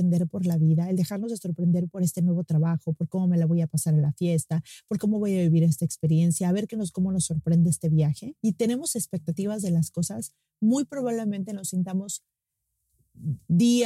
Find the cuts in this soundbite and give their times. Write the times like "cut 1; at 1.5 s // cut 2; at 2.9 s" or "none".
cut 1; at 8.4 s